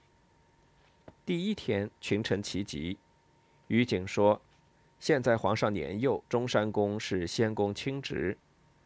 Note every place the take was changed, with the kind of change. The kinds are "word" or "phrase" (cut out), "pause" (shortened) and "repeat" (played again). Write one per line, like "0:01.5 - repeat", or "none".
0:01.2 - pause
0:06.3 - pause